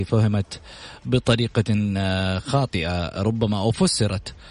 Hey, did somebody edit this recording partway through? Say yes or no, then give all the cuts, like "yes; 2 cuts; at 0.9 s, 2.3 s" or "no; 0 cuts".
no; 0 cuts